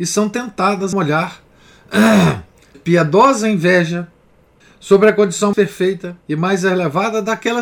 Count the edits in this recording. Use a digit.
5